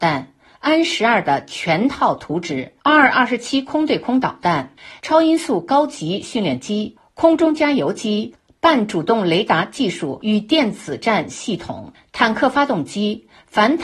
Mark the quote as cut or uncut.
cut